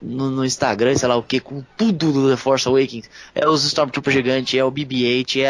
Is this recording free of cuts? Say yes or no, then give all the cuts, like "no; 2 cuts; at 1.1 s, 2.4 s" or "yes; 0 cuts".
yes; 0 cuts